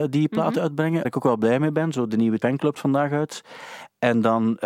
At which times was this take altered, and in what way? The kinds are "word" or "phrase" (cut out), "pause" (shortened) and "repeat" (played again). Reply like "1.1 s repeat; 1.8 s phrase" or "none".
1.0 s word; 2.4 s word; 2.8 s word